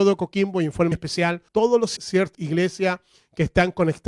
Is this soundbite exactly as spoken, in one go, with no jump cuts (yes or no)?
no